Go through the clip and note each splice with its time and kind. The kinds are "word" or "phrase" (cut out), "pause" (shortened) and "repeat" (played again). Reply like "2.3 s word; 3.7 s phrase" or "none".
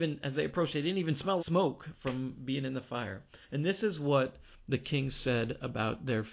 1.4 s word; 3.4 s pause